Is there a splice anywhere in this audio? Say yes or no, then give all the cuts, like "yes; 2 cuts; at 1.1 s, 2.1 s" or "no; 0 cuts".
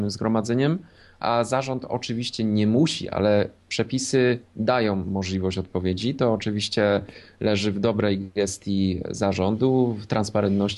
yes; 1 cut; at 3.6 s